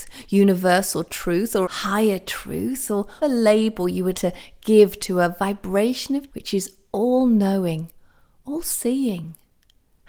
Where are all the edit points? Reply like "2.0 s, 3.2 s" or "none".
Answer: 1.6 s, 3.2 s, 4.1 s, 6.3 s